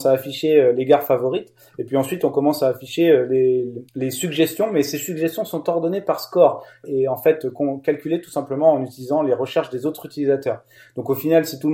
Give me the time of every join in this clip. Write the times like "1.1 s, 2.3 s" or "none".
3.9 s, 6.8 s